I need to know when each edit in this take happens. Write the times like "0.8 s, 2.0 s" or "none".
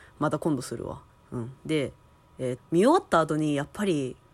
1.1 s, 1.6 s, 2.6 s